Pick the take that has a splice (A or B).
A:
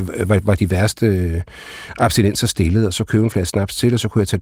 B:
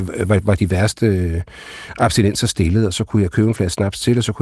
A